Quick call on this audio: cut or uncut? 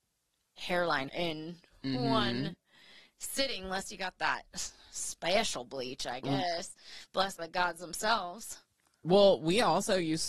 cut